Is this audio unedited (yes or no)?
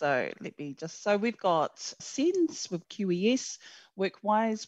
no